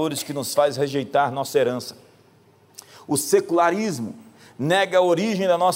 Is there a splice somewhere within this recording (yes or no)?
no